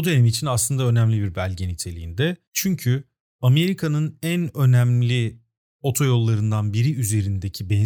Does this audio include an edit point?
no; 0 cuts

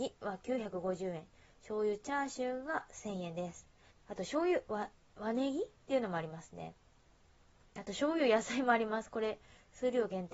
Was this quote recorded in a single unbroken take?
no; 1 cut; at 3.9 s

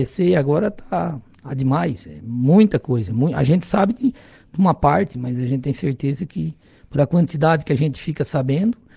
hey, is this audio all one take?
yes; 0 cuts

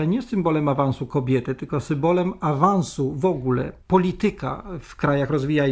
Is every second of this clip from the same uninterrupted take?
yes; 0 cuts

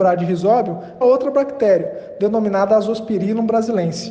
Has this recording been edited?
yes; 1 cut; at 1.0 s

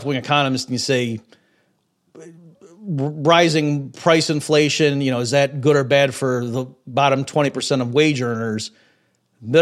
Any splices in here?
no; 0 cuts

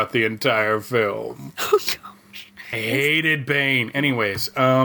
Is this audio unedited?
no; 1 cut; at 2.7 s

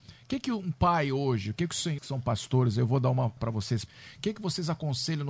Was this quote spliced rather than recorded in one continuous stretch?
yes; 3 cuts; at 2.0 s, 3.4 s, 3.9 s

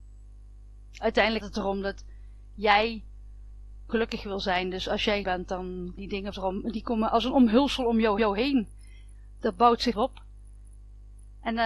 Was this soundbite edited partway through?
yes; 7 cuts; at 1.4 s, 3.9 s, 5.2 s, 6.0 s, 6.3 s, 8.2 s, 9.9 s

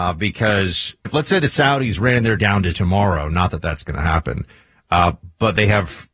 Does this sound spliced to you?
yes; 3 cuts; at 1.0 s, 2.4 s, 2.7 s

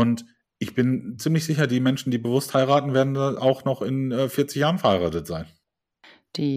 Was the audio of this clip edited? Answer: no; 0 cuts

